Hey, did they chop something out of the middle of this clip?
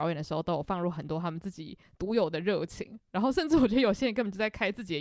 no; 0 cuts

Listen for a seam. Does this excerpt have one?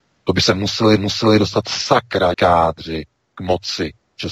yes; 2 cuts; at 1.0 s, 2.3 s

